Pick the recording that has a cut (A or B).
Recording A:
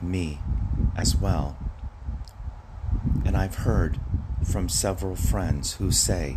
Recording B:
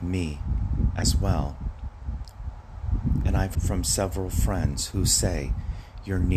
B